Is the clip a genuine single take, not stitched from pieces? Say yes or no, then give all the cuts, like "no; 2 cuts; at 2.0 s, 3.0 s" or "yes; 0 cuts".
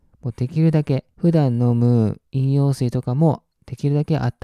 no; 1 cut; at 1.1 s